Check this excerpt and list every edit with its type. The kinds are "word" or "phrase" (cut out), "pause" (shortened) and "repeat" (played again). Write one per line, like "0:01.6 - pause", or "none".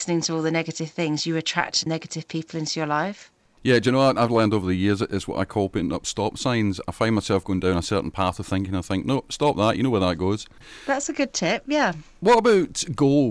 0:01.9 - word